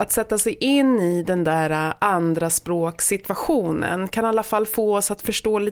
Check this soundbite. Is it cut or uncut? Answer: uncut